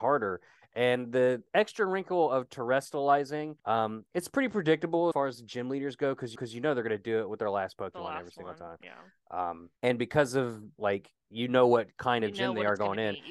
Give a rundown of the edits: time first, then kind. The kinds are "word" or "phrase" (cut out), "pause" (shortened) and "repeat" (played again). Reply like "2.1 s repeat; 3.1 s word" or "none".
3.6 s pause; 5.1 s phrase; 6.4 s repeat; 9.8 s pause; 10.8 s phrase